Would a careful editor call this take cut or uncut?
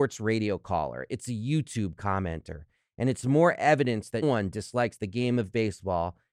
cut